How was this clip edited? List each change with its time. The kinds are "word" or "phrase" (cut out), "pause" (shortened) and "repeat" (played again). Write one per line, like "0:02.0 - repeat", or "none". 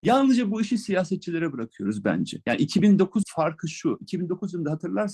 0:03.2 - word